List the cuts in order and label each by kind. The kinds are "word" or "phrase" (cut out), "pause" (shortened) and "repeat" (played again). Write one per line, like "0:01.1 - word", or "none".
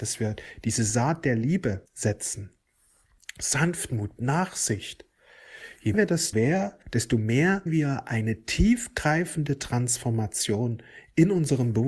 0:01.9 - pause
0:04.2 - word
0:05.9 - word
0:06.3 - phrase
0:06.8 - pause
0:07.7 - word